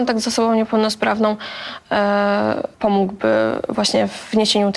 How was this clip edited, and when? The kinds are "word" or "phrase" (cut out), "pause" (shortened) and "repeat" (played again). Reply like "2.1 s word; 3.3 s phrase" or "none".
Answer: 2.7 s pause